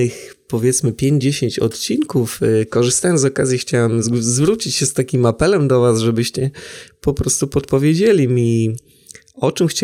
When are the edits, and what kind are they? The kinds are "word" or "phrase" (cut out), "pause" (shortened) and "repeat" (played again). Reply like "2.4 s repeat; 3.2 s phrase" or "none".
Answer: none

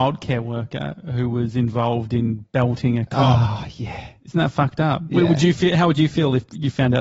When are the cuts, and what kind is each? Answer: none

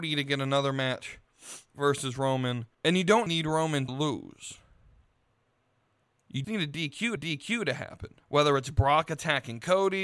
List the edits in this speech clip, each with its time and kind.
2.7 s pause; 3.3 s word; 3.9 s word; 6.4 s word; 7.2 s repeat; 8.2 s pause

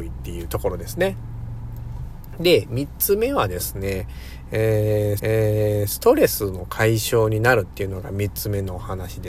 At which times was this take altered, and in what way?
5.2 s repeat

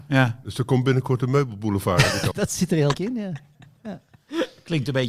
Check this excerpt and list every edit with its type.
2.3 s word; 2.9 s word

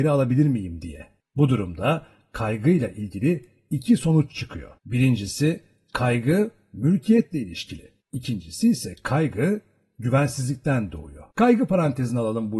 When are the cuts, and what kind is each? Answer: 4.8 s pause; 8.0 s pause; 11.3 s pause

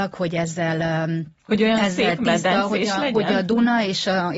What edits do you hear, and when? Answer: 1.4 s pause

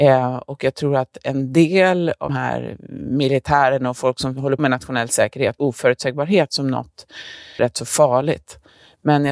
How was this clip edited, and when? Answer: 2.3 s word; 4.6 s word; 5.6 s phrase; 7.6 s word

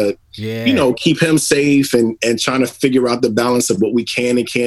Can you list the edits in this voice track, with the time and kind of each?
none

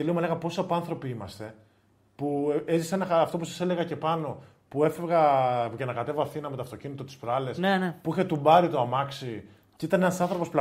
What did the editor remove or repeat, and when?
none

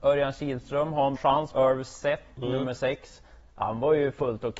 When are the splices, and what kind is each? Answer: 1.2 s word; 1.5 s word

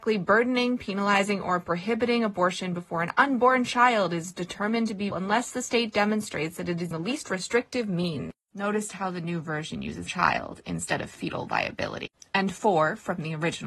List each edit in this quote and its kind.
5.1 s word; 6.9 s word; 10.1 s word

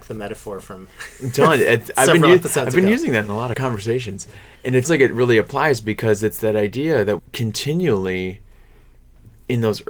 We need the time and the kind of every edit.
3.5 s word; 4.8 s word; 7.2 s word

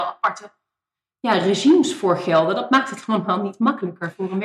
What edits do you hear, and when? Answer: none

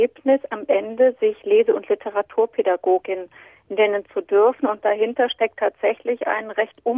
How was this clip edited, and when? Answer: none

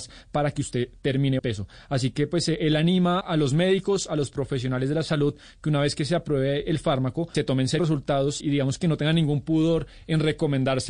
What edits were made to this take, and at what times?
1.4 s phrase; 3.2 s word; 7.3 s word; 7.8 s word; 8.4 s word

